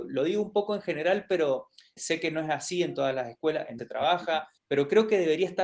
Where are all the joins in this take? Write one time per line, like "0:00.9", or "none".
0:02.0
0:03.8
0:04.6